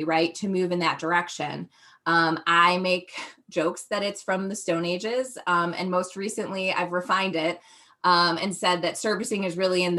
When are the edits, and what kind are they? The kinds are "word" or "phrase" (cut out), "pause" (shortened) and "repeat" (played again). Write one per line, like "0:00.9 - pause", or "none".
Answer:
none